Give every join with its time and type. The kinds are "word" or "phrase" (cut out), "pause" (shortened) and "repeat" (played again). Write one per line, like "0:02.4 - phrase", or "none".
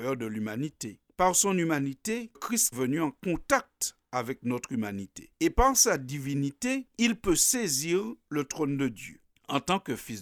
0:02.3 - word
0:02.7 - word